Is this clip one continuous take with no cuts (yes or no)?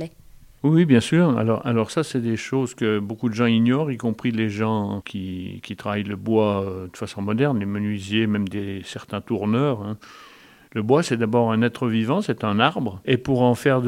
yes